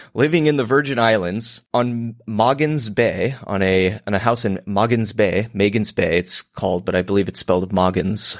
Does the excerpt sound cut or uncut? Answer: cut